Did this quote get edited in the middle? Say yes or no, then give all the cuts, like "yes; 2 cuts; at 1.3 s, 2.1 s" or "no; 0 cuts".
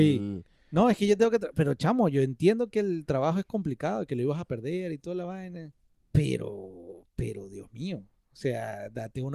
yes; 1 cut; at 5.9 s